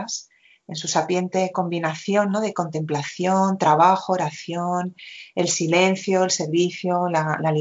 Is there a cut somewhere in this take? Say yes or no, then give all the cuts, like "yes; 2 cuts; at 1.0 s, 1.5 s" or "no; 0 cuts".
no; 0 cuts